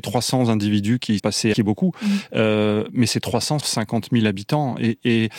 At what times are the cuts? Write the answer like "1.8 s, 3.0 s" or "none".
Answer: 1.2 s, 1.5 s, 3.6 s